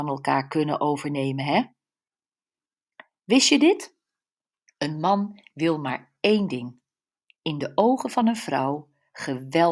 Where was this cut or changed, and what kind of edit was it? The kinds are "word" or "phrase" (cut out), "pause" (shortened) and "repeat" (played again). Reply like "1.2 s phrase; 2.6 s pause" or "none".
none